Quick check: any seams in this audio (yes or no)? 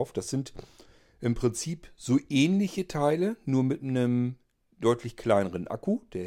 no